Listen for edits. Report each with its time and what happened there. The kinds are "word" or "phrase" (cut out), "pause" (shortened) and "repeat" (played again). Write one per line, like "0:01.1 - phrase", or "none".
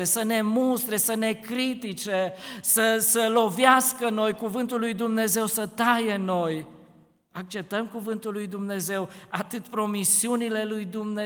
none